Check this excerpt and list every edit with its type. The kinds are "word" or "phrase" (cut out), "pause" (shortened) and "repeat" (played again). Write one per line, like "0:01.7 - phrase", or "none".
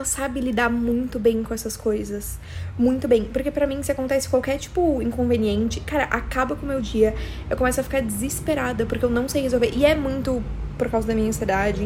none